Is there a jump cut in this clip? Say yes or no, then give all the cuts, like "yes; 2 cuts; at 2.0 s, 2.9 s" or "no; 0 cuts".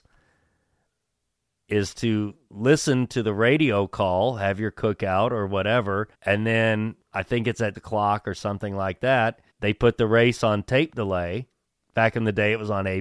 yes; 5 cuts; at 6.1 s, 7.0 s, 7.7 s, 9.5 s, 11.6 s